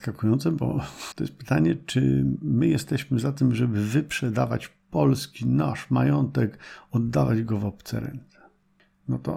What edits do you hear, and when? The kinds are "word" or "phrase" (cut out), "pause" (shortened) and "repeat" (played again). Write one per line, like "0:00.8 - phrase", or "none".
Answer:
0:01.1 - word